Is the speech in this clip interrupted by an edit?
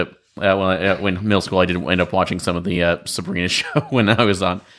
no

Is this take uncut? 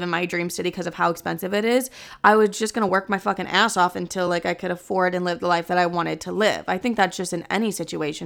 yes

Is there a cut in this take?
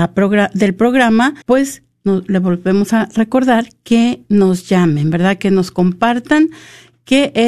yes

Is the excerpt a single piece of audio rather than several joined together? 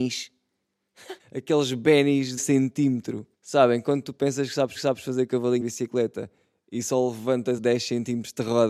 no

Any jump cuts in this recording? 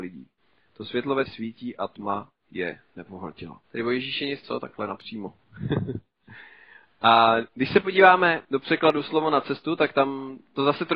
yes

